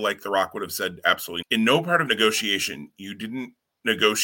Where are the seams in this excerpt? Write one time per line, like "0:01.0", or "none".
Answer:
0:01.4
0:02.1